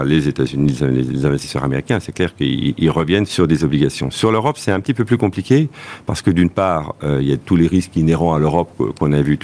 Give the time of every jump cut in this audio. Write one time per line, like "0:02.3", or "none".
0:03.3